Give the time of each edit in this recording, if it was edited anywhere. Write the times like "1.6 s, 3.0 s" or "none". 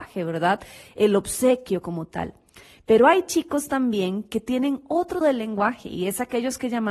5.2 s